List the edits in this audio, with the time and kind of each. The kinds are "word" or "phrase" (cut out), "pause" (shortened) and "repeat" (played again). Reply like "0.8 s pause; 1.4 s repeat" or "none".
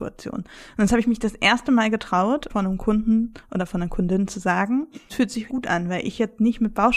2.5 s word; 5.1 s word; 5.5 s word